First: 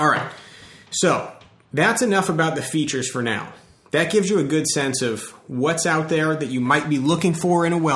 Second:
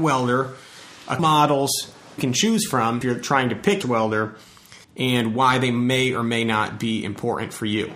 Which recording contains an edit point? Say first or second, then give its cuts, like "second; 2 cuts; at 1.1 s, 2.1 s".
second; 5 cuts; at 1.2 s, 2.2 s, 3.0 s, 3.8 s, 4.8 s